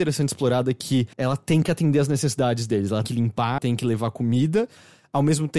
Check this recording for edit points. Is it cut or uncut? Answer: cut